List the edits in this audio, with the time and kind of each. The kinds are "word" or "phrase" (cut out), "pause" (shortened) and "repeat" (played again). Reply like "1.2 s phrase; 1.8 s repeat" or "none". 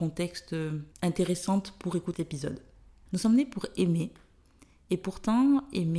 0.9 s pause; 2.1 s word